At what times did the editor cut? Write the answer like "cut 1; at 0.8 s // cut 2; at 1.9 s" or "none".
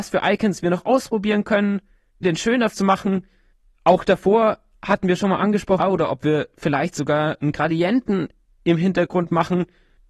cut 1; at 2.2 s // cut 2; at 2.7 s // cut 3; at 5.8 s